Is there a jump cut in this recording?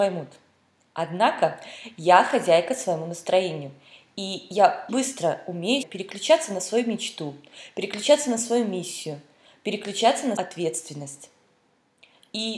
yes; 3 cuts; at 4.9 s, 5.8 s, 10.4 s

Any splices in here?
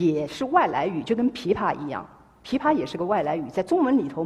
no; 0 cuts

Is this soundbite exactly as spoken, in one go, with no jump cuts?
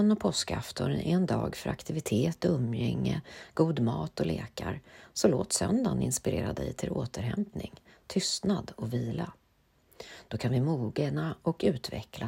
yes; 0 cuts

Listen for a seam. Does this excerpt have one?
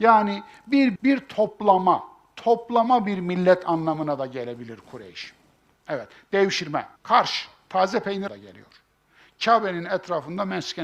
yes; 3 cuts; at 1.0 s, 7.0 s, 8.3 s

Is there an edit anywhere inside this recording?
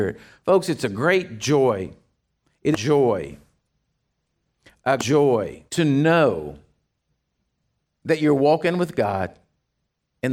yes; 3 cuts; at 2.7 s, 5.0 s, 5.7 s

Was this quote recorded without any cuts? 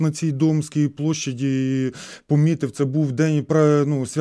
yes; 0 cuts

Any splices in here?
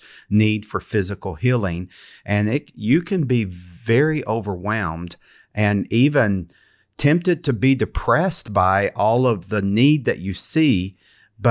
no; 0 cuts

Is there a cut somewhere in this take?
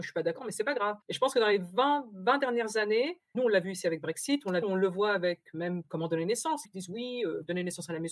yes; 4 cuts; at 1.0 s, 3.3 s, 4.6 s, 6.6 s

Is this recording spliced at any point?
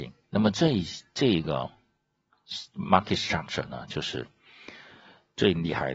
no; 0 cuts

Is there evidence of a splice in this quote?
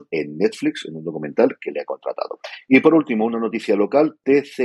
no; 0 cuts

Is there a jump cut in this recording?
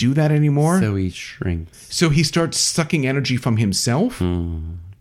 no; 0 cuts

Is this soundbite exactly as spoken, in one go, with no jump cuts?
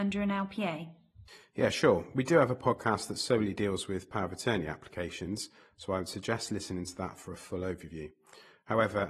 yes; 0 cuts

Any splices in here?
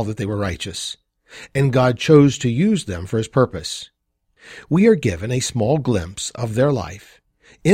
no; 0 cuts

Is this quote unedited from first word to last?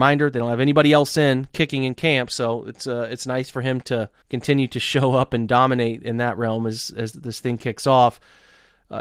no; 2 cuts; at 4.2 s, 7.1 s

